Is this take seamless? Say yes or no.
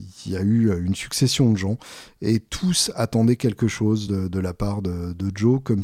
yes